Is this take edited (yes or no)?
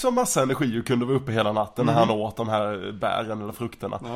no